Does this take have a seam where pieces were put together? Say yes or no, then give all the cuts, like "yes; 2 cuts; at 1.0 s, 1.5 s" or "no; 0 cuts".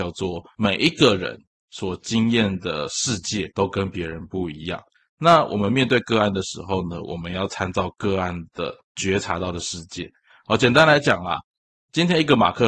yes; 1 cut; at 3.5 s